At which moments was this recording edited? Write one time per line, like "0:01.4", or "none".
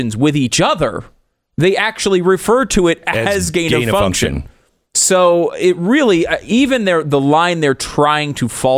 none